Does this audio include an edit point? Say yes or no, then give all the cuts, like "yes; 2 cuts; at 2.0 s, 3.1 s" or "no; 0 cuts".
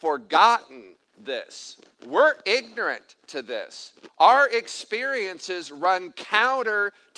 no; 0 cuts